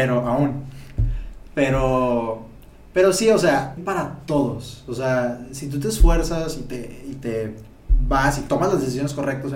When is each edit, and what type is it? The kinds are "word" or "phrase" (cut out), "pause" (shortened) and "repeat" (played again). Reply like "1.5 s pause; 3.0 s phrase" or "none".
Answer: 3.8 s word